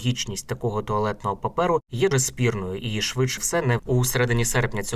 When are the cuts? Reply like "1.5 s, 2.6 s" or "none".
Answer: 2.1 s, 3.4 s, 3.8 s